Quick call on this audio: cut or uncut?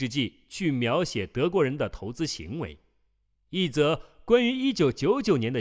uncut